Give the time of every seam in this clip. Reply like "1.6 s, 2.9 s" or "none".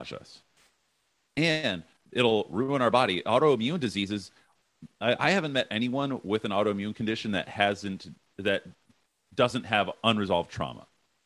none